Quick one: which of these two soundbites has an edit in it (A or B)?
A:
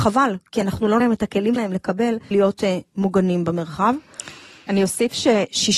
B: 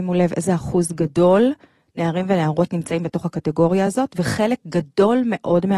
A